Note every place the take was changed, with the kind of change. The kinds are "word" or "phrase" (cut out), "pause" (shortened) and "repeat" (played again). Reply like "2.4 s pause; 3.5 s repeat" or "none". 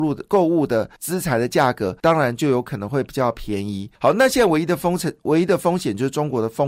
1.0 s pause; 2.0 s pause; 3.9 s pause